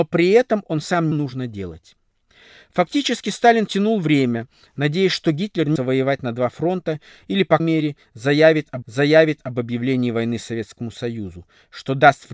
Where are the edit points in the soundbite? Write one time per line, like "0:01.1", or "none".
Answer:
0:01.1
0:05.8
0:07.6
0:08.8